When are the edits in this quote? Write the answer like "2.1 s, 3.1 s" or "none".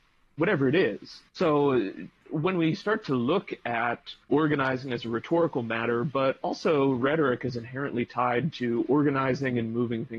1.3 s, 4.2 s